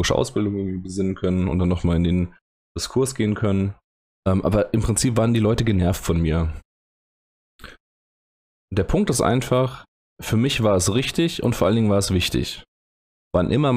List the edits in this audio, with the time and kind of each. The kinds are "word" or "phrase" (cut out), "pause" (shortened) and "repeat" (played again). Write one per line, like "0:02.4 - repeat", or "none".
none